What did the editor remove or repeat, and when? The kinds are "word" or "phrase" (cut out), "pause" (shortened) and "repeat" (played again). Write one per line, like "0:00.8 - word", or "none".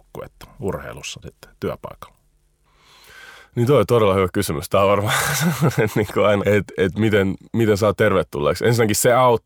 0:01.2 - word
0:06.4 - word
0:07.5 - pause